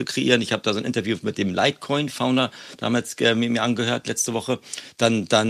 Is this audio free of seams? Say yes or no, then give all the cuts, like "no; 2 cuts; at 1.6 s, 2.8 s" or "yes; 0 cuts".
yes; 0 cuts